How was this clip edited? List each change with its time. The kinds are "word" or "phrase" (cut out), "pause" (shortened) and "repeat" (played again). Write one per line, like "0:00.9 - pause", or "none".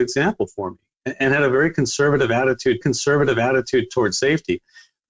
0:02.8 - repeat